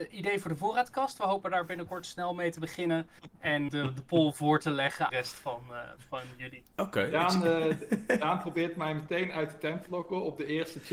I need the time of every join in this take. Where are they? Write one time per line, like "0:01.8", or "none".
0:03.7
0:05.1
0:06.7